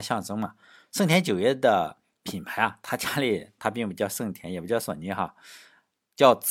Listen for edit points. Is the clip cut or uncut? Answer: uncut